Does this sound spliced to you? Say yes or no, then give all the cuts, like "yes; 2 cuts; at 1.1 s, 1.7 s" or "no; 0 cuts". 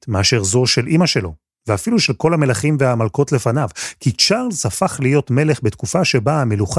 no; 0 cuts